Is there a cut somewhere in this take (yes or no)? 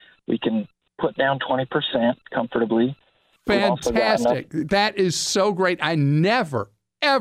no